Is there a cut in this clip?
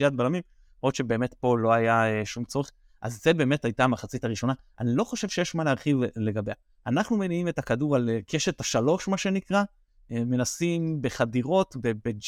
no; 0 cuts

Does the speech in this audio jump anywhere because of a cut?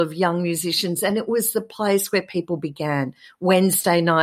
no; 0 cuts

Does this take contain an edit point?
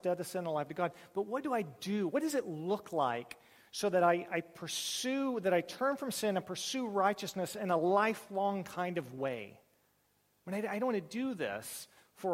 no; 0 cuts

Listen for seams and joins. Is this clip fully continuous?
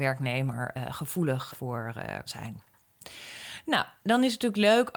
no; 2 cuts; at 1.5 s, 2.3 s

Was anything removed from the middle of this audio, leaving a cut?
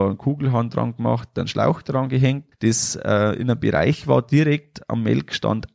yes; 1 cut; at 2.5 s

